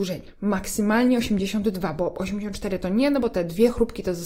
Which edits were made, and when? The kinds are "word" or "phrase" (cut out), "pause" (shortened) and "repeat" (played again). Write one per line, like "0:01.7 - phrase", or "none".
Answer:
none